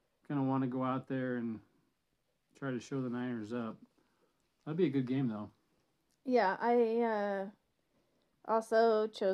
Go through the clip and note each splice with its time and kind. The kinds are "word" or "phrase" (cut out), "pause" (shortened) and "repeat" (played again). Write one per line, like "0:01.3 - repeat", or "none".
none